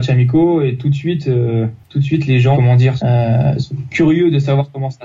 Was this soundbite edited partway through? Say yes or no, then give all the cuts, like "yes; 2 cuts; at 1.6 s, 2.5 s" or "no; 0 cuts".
yes; 2 cuts; at 2.5 s, 3.0 s